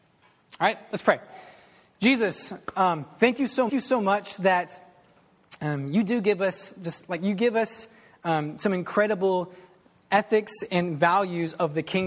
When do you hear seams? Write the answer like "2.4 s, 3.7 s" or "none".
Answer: 3.7 s